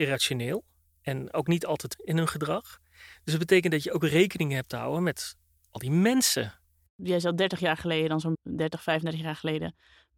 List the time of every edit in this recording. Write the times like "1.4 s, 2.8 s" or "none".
1.9 s, 8.3 s